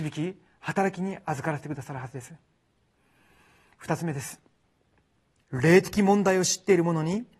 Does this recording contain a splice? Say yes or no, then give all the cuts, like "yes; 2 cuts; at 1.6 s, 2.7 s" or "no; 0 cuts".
no; 0 cuts